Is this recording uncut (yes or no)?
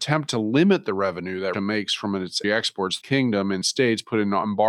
no